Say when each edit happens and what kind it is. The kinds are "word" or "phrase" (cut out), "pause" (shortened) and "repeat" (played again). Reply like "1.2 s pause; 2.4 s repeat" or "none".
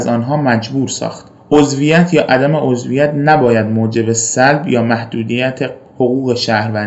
none